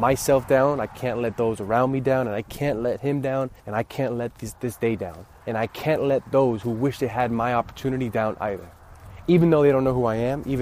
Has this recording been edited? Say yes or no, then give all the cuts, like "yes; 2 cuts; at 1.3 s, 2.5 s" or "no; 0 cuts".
yes; 2 cuts; at 3.6 s, 5.4 s